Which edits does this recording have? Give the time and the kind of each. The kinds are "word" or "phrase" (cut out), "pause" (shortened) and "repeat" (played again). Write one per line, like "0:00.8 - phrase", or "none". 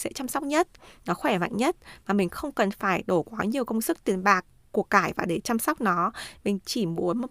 none